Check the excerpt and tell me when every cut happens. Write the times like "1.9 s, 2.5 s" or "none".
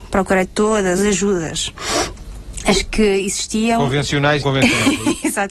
1.0 s, 4.4 s